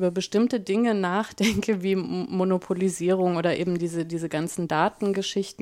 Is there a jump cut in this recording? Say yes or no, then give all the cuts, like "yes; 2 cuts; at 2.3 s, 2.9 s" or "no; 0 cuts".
no; 0 cuts